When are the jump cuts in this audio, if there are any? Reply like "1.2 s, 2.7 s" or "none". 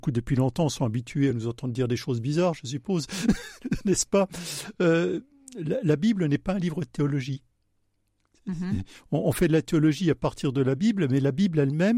none